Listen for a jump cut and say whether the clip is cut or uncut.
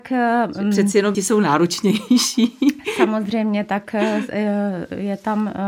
cut